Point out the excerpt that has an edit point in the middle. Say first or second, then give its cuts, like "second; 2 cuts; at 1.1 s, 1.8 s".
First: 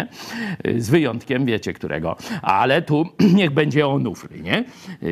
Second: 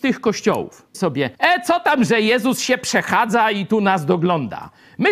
second; 2 cuts; at 0.9 s, 1.3 s